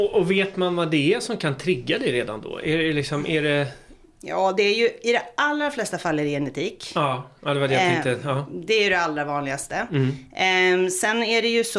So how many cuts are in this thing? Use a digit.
1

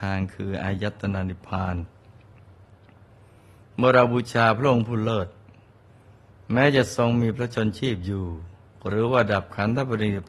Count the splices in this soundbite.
1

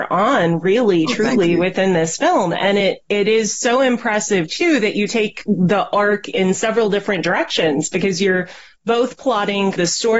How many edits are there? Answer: 0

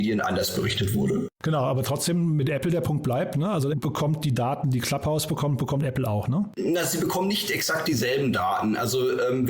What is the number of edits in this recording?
2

